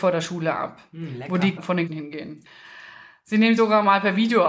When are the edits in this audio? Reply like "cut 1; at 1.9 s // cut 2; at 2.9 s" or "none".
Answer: cut 1; at 1.6 s // cut 2; at 1.9 s // cut 3; at 3.6 s

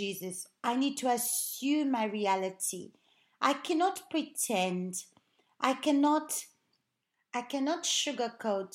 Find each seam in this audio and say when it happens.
none

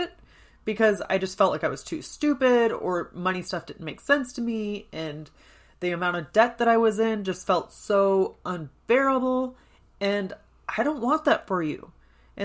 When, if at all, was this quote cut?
none

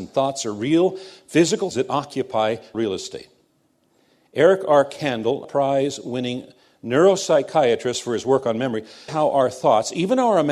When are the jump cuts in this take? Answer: cut 1; at 1.7 s // cut 2; at 2.7 s // cut 3; at 5.4 s // cut 4; at 9.1 s

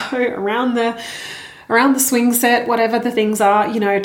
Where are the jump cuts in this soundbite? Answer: none

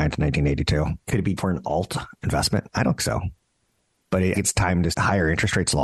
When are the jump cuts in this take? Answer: cut 1; at 1.0 s // cut 2; at 1.4 s // cut 3; at 3.0 s // cut 4; at 4.3 s // cut 5; at 4.9 s

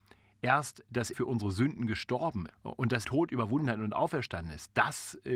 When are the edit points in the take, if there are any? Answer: cut 1; at 1.1 s // cut 2; at 2.5 s // cut 3; at 3.0 s

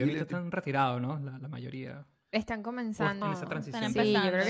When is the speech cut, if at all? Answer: cut 1; at 3.2 s

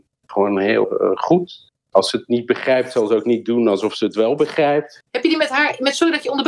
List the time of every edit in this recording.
cut 1; at 5.1 s

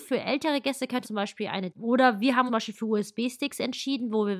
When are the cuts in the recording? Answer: cut 1; at 1.0 s // cut 2; at 1.7 s // cut 3; at 2.5 s

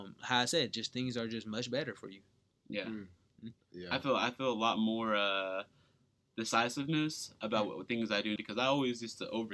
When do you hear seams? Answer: cut 1; at 8.4 s

